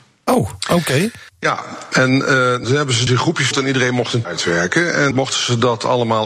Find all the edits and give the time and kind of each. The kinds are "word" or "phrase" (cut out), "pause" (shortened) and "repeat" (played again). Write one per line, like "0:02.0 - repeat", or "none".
0:01.3 - pause
0:02.6 - word
0:03.1 - word
0:03.5 - word
0:04.2 - word
0:05.1 - word